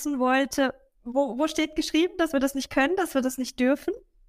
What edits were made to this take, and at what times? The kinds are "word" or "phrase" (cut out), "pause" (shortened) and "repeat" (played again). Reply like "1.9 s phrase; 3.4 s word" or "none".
none